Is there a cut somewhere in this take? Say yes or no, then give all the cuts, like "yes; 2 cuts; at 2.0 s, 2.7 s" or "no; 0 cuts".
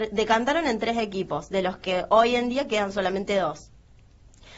no; 0 cuts